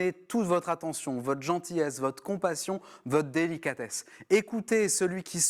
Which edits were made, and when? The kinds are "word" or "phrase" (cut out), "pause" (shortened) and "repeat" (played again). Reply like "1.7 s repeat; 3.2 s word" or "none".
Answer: none